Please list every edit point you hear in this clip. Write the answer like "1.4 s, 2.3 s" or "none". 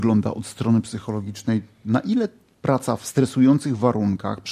none